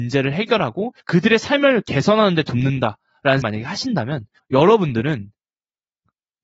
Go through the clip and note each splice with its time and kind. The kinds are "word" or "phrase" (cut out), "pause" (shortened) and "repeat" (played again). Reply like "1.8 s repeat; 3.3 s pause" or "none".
1.0 s pause; 3.4 s word; 4.4 s pause